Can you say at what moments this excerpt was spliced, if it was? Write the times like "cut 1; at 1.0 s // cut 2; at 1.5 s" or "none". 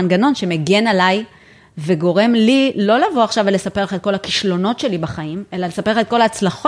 none